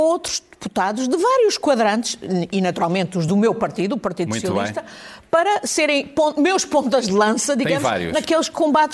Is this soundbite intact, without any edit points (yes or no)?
yes